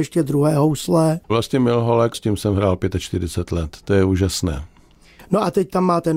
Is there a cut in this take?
yes; 3 cuts; at 1.2 s, 2.1 s, 3.8 s

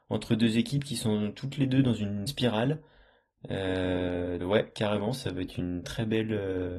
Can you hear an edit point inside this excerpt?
yes; 3 cuts; at 2.3 s, 4.4 s, 5.8 s

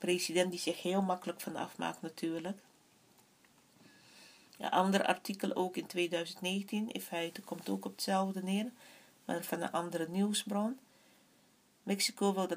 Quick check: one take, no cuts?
yes; 0 cuts

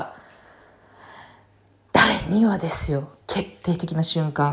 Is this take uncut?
no; 1 cut; at 3.2 s

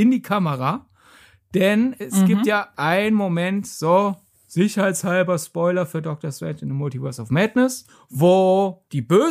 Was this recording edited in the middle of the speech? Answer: no; 0 cuts

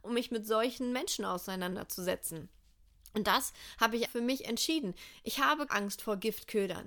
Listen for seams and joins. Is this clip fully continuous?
no; 2 cuts; at 4.1 s, 5.7 s

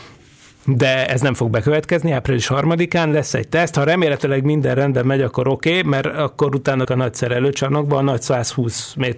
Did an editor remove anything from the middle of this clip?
yes; 1 cut; at 6.8 s

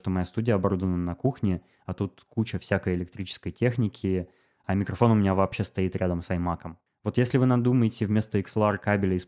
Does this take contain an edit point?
no; 0 cuts

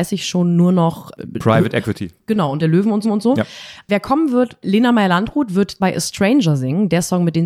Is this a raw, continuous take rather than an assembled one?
no; 3 cuts; at 2.6 s, 3.0 s, 5.8 s

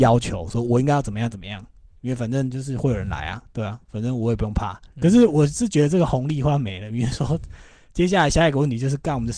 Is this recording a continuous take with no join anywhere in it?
yes; 0 cuts

